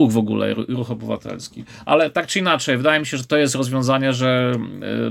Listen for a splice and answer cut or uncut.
uncut